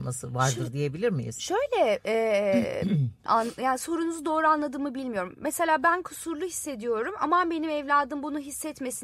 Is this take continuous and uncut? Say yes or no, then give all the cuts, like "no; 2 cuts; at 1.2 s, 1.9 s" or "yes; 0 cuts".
no; 1 cut; at 3.3 s